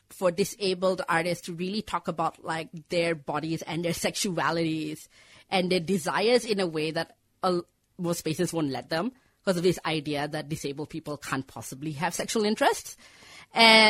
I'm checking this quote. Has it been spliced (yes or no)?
no